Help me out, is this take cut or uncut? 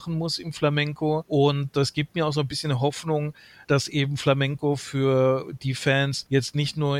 uncut